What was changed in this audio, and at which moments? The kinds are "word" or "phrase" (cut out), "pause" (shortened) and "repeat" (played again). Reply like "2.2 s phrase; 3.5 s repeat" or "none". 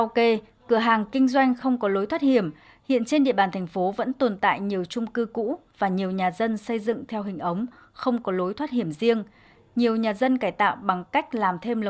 none

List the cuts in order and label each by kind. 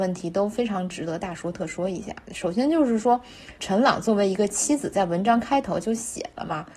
3.6 s pause

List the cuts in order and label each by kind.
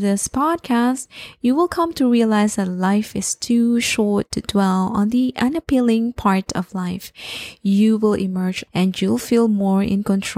8.7 s word

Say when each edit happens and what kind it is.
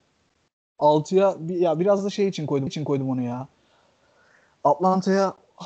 2.7 s repeat

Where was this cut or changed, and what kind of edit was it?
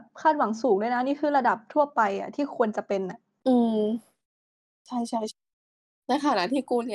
none

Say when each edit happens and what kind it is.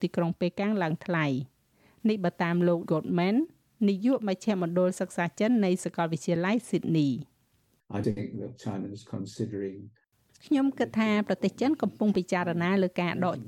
2.9 s word; 8.0 s word

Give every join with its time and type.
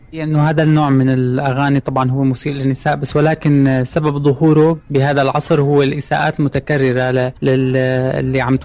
7.4 s pause

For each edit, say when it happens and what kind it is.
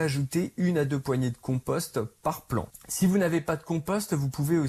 none

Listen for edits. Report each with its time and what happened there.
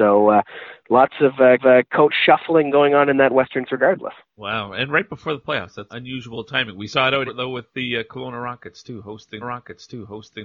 1.6 s repeat; 3.7 s word; 5.9 s word; 7.3 s word; 9.4 s repeat

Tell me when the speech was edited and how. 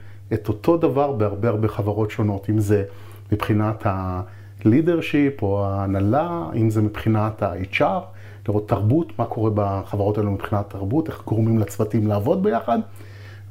none

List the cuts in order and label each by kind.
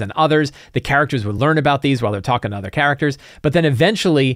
none

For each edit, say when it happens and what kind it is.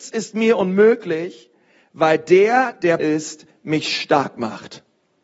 3.0 s phrase

